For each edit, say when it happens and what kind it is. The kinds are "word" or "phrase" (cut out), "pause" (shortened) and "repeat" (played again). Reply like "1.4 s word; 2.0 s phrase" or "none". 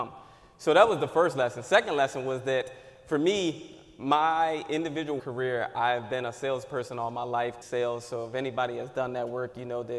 5.2 s word; 7.6 s word